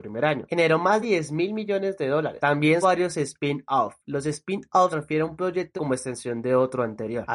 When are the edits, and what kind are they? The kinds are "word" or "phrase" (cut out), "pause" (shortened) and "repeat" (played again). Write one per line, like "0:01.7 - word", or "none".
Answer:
0:01.0 - word
0:02.8 - word
0:04.9 - word
0:05.8 - word